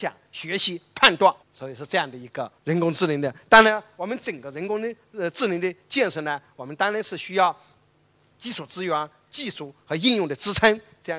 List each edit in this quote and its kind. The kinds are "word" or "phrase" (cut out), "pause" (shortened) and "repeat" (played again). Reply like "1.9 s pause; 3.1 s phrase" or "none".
1.4 s pause; 2.6 s pause